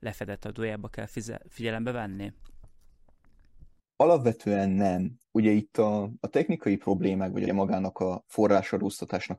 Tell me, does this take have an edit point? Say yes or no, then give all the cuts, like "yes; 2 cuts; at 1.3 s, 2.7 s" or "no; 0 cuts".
yes; 3 cuts; at 3.8 s, 5.2 s, 7.5 s